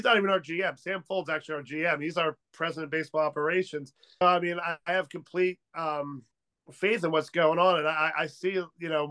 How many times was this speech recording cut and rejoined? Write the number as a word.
one